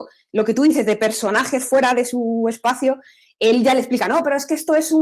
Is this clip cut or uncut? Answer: uncut